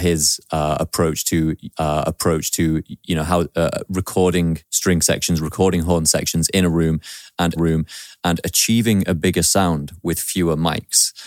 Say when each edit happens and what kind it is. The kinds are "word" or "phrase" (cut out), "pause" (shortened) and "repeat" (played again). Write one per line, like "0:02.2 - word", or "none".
0:01.7 - repeat
0:04.6 - pause
0:07.6 - repeat